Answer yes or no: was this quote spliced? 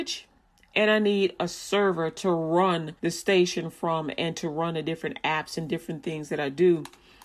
yes